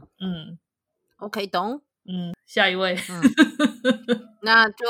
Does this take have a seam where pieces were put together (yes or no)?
no